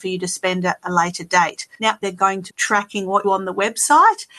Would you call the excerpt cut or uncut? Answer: cut